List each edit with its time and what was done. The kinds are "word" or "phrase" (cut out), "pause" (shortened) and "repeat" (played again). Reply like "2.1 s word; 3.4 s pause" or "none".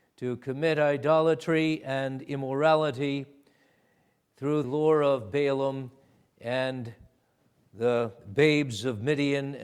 4.6 s word